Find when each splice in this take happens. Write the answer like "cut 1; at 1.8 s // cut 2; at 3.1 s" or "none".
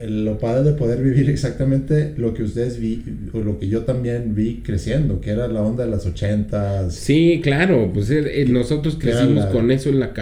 none